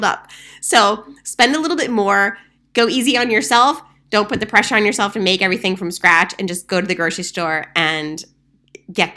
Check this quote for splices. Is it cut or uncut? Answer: uncut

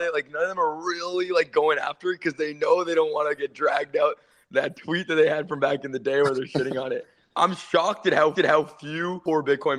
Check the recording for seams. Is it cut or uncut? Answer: cut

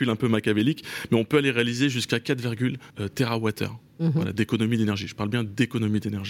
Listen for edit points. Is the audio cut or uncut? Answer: cut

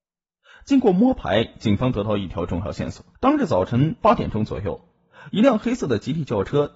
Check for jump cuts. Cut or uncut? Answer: cut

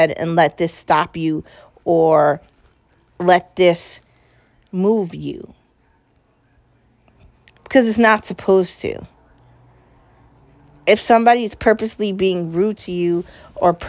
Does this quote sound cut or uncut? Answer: uncut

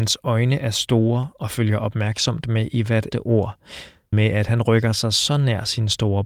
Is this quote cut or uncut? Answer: cut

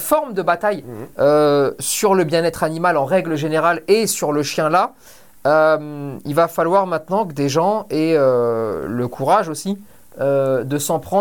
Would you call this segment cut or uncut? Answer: uncut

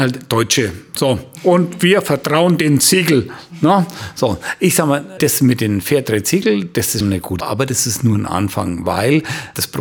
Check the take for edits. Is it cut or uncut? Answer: cut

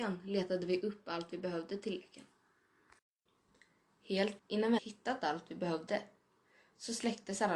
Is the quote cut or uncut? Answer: cut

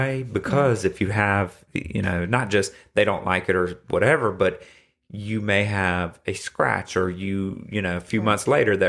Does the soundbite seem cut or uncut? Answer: uncut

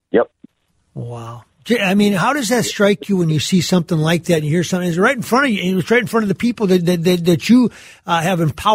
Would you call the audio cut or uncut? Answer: uncut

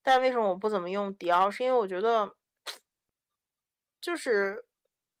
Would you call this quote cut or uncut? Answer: uncut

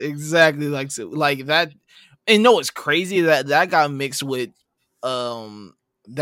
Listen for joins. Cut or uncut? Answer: uncut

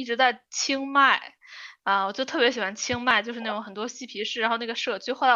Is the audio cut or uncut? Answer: uncut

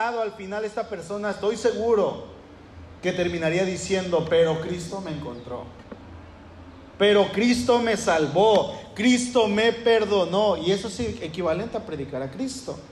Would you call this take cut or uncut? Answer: uncut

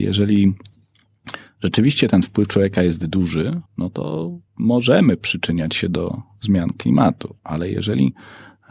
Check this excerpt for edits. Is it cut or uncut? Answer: cut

